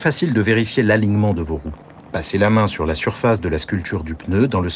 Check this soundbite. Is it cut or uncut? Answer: uncut